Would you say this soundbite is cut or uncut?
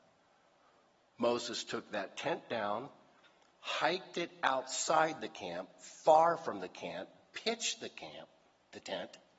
uncut